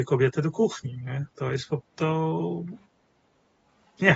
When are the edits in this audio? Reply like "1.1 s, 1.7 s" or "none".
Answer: 1.8 s